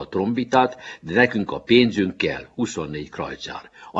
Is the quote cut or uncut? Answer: uncut